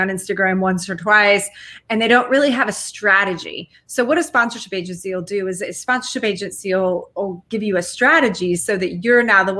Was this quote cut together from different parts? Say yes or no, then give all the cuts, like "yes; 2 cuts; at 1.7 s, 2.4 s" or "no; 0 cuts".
no; 0 cuts